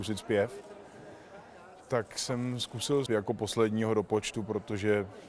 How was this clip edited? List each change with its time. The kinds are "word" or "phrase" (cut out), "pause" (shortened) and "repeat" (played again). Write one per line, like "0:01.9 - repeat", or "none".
0:03.1 - phrase